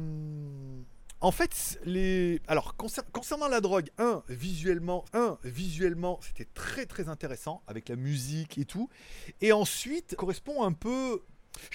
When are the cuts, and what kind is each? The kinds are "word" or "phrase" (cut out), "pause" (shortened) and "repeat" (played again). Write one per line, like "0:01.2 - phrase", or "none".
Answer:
0:05.1 - repeat
0:10.2 - word